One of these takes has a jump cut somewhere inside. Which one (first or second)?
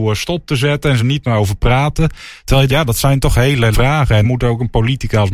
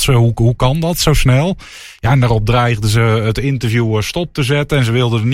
first